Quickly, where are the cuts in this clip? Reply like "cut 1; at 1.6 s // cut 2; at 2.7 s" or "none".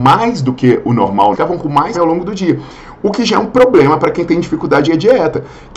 cut 1; at 1.3 s // cut 2; at 1.9 s // cut 3; at 4.9 s